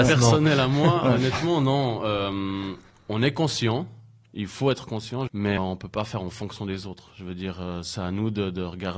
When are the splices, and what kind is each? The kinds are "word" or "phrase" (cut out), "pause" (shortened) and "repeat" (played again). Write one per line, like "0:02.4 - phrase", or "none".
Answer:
0:05.3 - word
0:05.6 - word